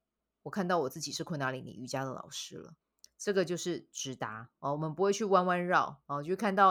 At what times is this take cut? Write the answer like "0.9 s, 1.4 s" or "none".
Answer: 2.8 s